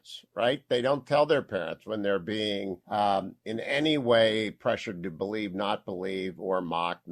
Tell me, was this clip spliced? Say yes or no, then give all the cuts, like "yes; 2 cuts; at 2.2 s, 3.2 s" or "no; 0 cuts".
yes; 1 cut; at 2.8 s